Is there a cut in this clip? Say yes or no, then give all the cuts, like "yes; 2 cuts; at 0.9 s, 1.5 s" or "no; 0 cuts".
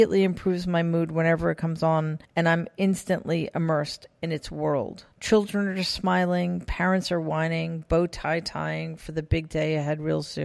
yes; 2 cuts; at 2.3 s, 5.1 s